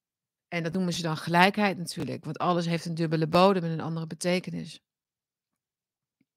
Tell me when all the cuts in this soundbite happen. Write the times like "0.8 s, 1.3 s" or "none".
none